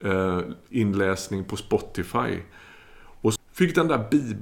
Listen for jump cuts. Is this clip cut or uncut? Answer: cut